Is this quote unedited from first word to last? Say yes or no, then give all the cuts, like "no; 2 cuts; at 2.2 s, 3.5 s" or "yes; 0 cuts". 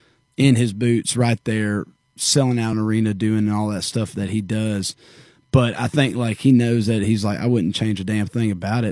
yes; 0 cuts